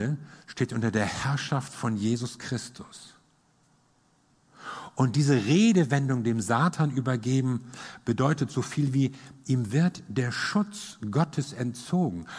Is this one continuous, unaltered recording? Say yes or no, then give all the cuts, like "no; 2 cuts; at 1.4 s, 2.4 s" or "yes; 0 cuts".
yes; 0 cuts